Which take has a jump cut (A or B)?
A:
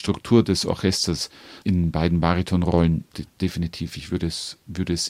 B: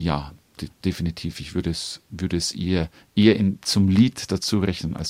A